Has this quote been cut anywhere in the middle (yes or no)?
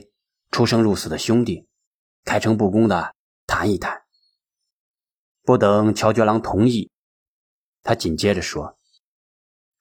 yes